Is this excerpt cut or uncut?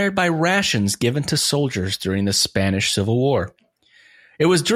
uncut